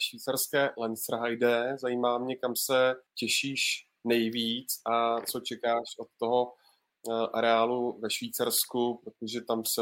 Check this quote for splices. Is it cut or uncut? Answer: cut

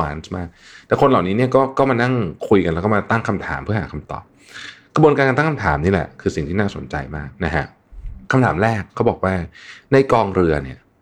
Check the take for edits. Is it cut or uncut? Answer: cut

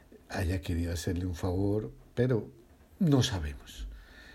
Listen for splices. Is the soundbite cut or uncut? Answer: uncut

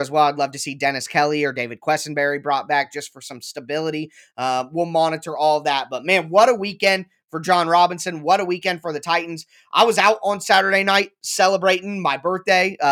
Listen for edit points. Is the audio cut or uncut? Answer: uncut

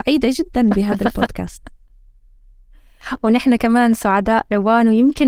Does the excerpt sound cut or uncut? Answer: uncut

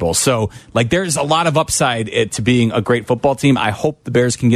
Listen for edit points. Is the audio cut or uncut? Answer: uncut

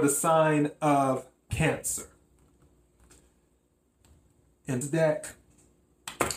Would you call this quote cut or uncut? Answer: cut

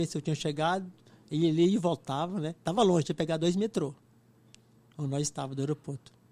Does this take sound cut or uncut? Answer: uncut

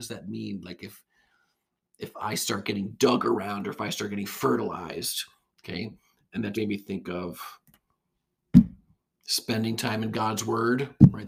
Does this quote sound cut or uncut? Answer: cut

